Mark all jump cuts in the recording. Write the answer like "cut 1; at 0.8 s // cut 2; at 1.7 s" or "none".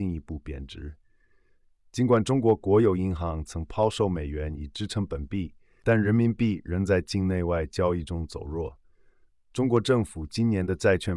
none